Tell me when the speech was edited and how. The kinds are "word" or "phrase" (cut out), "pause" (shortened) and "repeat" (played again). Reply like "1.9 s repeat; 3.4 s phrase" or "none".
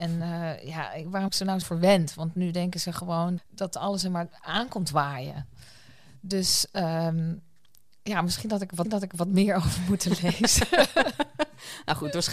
1.3 s word; 1.6 s word; 3.4 s word; 8.8 s repeat